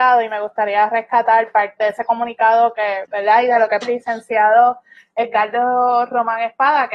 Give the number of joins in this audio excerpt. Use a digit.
3